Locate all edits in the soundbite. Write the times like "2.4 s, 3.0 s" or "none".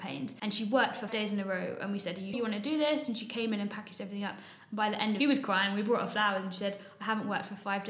1.1 s, 2.3 s, 5.2 s